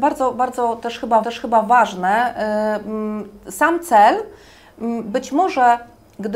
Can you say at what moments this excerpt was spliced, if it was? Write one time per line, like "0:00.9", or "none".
0:01.2